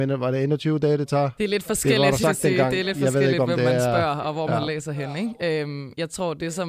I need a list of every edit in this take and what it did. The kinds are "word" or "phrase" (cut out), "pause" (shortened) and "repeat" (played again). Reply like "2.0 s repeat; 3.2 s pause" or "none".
2.2 s phrase